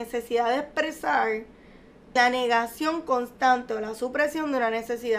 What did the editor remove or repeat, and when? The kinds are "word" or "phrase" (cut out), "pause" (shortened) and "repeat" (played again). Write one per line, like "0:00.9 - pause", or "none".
0:02.2 - word